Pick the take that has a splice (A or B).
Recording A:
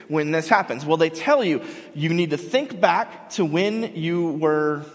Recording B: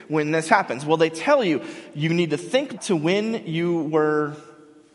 B